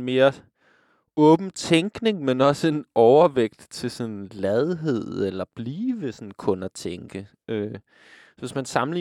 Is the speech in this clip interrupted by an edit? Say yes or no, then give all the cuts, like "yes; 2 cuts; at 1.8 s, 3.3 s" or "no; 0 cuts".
no; 0 cuts